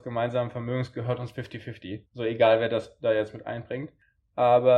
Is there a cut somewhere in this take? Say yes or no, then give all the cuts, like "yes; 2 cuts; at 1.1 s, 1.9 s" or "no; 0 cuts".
yes; 1 cut; at 2.0 s